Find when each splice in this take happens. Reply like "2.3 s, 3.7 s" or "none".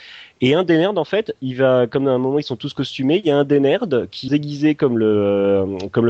4.3 s